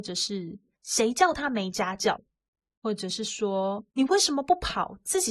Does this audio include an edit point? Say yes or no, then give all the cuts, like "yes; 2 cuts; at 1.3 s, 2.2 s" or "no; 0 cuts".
yes; 1 cut; at 3.9 s